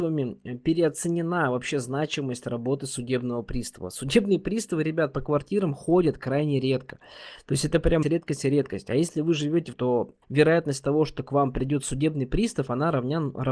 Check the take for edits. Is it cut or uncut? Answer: cut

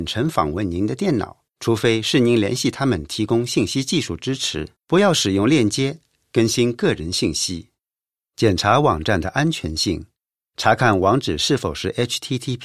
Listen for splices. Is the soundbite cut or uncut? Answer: cut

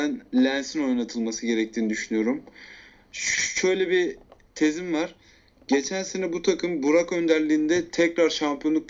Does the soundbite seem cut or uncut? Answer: uncut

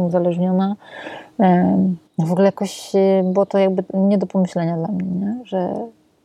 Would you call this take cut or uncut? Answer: cut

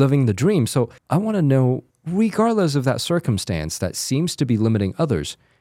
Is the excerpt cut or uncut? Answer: cut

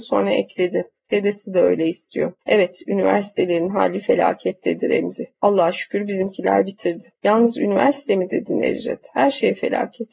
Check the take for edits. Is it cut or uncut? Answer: cut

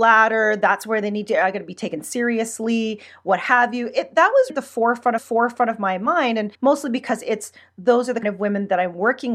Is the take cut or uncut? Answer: cut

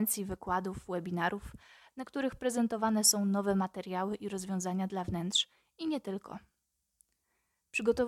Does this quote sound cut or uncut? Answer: uncut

